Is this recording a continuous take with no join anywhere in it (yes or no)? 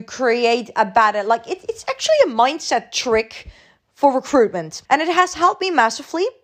no